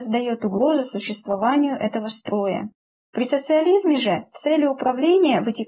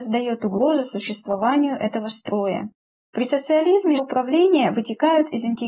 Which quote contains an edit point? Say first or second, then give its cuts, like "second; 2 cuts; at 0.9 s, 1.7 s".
second; 1 cut; at 4.0 s